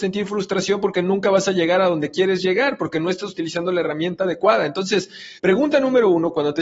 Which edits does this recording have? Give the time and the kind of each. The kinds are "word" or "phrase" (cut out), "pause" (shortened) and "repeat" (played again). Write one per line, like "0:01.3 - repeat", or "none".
0:05.4 - pause

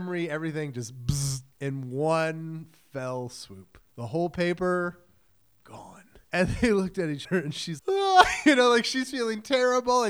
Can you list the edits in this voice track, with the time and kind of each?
0:01.5 - pause
0:03.9 - pause
0:06.2 - pause
0:07.2 - word
0:07.8 - word

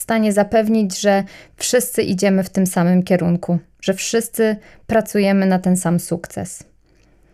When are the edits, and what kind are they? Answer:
none

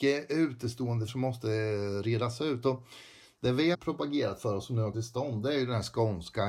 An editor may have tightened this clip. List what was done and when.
0:01.1 - word
0:03.7 - word
0:04.9 - word

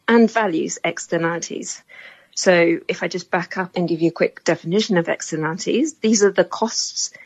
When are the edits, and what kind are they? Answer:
none

